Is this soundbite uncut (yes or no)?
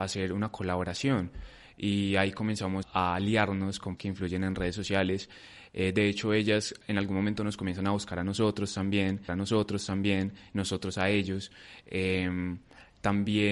no